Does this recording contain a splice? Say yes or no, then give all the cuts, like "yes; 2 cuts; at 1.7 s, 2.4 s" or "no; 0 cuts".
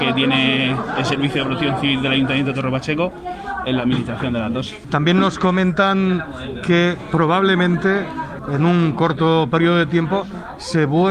no; 0 cuts